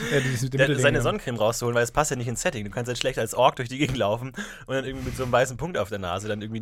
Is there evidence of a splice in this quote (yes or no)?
no